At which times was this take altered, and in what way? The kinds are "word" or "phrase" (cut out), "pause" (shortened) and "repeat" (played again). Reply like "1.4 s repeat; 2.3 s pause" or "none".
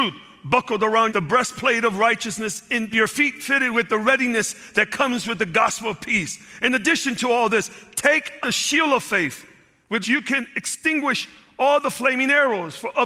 1.1 s phrase; 2.9 s phrase; 8.4 s word; 10.0 s word